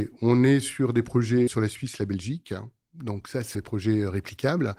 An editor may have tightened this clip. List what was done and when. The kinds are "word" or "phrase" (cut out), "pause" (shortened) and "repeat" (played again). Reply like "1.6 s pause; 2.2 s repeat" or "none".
1.5 s word; 3.5 s word